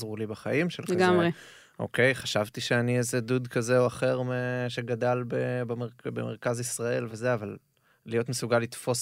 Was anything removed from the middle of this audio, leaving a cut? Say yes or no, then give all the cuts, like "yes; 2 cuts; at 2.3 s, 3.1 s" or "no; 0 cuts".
no; 0 cuts